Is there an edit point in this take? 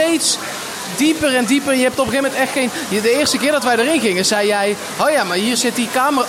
no; 0 cuts

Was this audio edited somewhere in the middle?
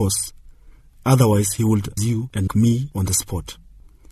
yes; 2 cuts; at 2.0 s, 2.5 s

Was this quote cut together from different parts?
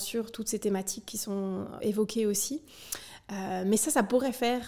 yes; 1 cut; at 1.8 s

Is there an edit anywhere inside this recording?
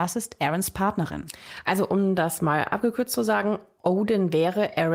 no; 0 cuts

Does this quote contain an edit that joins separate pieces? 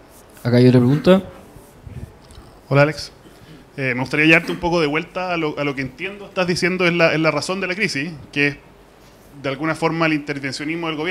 no; 0 cuts

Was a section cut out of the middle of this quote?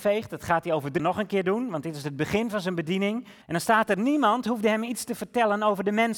yes; 2 cuts; at 1.0 s, 3.4 s

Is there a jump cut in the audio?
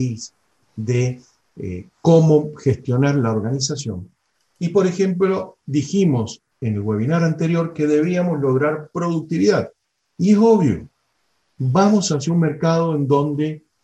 no; 0 cuts

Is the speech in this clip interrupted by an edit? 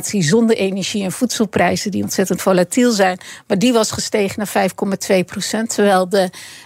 no; 0 cuts

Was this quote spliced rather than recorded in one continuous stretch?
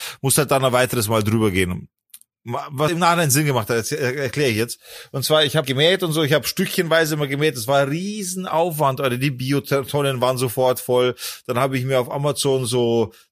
yes; 2 cuts; at 2.9 s, 5.6 s

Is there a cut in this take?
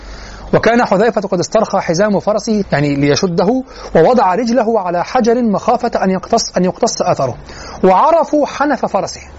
yes; 1 cut; at 2.6 s

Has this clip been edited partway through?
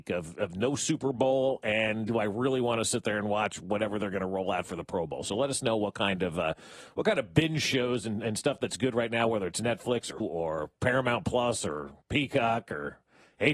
yes; 2 cuts; at 10.2 s, 12.0 s

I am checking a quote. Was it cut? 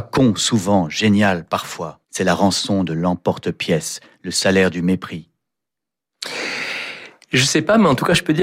yes; 1 cut; at 2.0 s

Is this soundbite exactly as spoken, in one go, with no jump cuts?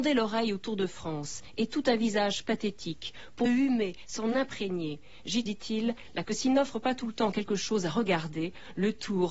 no; 3 cuts; at 3.5 s, 5.5 s, 6.2 s

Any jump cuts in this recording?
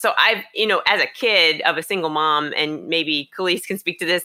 no; 0 cuts

